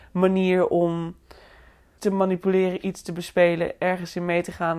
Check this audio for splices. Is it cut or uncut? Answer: cut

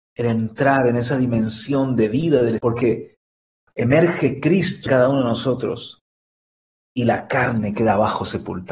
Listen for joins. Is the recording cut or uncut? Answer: cut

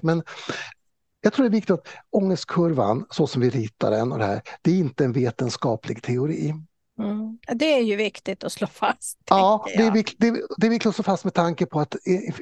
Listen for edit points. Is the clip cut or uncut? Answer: cut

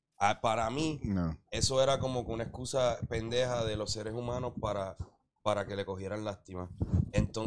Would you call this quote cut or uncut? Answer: uncut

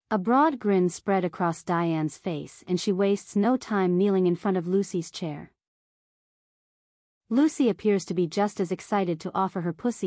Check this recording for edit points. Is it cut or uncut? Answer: uncut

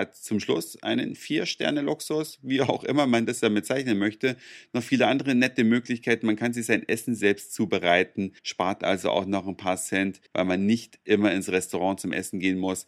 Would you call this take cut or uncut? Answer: cut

